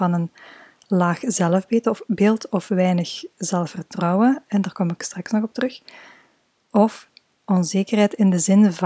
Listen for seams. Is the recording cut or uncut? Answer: uncut